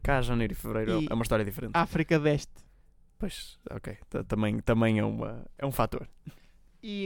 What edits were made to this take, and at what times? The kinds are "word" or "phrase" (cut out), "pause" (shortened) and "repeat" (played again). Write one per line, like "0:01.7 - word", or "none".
none